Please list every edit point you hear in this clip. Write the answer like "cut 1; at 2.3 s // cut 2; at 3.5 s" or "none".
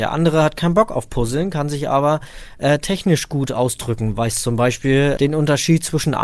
cut 1; at 5.2 s